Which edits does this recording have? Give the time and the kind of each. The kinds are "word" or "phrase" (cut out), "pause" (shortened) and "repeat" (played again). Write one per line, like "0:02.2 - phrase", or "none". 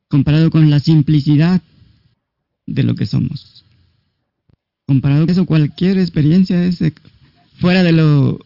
0:05.3 - word